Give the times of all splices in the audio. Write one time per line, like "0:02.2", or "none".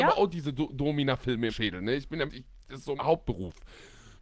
0:01.5
0:02.3
0:03.0